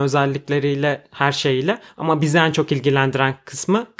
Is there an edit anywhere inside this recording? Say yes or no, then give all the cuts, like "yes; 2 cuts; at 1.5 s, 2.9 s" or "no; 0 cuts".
no; 0 cuts